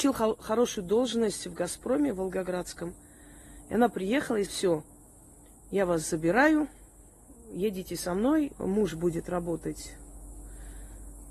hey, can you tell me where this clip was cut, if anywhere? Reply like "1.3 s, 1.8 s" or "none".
4.5 s, 8.5 s